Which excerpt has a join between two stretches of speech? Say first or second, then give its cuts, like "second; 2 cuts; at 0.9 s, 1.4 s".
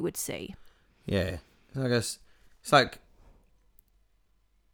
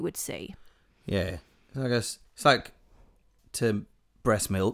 second; 2 cuts; at 2.3 s, 3.4 s